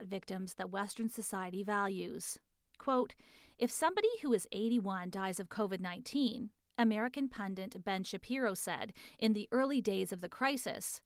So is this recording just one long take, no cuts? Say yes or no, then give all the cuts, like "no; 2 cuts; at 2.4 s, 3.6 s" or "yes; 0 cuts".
yes; 0 cuts